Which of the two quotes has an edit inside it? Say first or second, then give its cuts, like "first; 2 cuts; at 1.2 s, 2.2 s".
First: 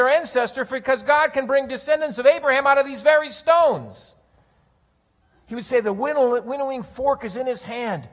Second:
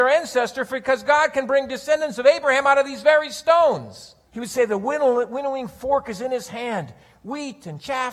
second; 1 cut; at 4.2 s